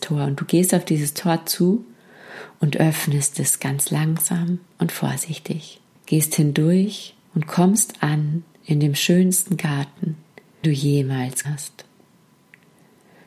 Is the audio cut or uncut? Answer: cut